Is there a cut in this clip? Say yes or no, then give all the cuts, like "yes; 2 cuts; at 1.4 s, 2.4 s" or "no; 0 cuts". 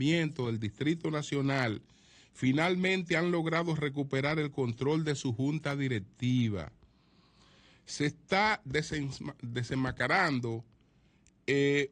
no; 0 cuts